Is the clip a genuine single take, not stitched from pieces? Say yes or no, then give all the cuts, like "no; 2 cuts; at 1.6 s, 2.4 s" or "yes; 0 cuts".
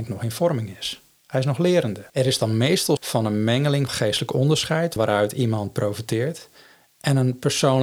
no; 4 cuts; at 2.1 s, 3.0 s, 3.9 s, 5.0 s